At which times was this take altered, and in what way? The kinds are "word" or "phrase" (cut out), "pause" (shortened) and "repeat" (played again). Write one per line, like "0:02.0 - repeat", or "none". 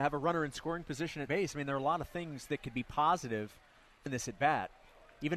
0:01.3 - word
0:04.1 - word